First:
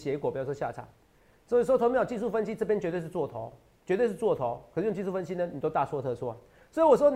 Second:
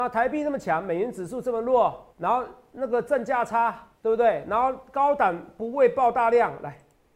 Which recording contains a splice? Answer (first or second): second